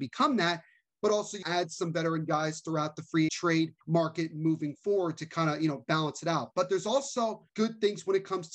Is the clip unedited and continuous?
no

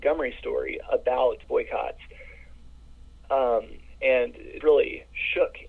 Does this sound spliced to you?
yes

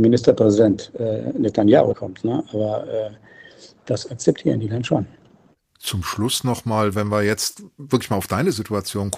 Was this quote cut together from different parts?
yes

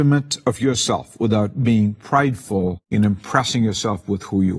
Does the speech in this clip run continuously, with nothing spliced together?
no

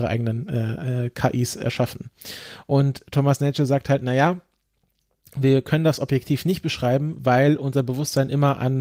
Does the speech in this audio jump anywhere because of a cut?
no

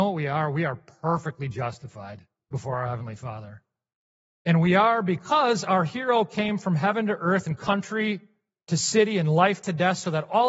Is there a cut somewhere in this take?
no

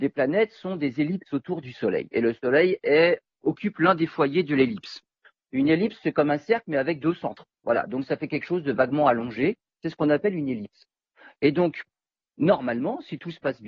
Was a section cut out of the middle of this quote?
no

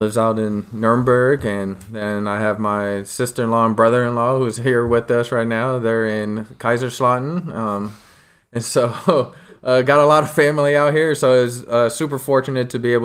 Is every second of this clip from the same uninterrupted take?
yes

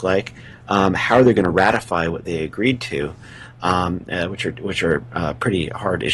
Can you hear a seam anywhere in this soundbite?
no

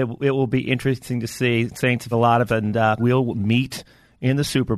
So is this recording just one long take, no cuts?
no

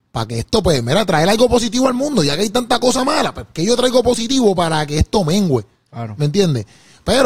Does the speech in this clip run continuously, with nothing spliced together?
yes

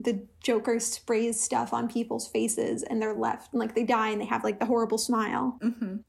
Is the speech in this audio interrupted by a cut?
no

